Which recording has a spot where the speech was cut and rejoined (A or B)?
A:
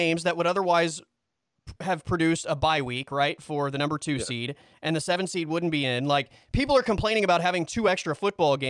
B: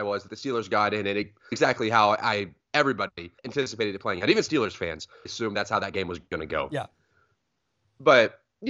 B